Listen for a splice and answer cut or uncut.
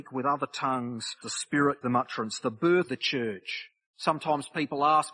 cut